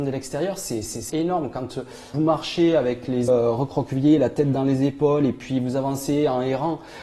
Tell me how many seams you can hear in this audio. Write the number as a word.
three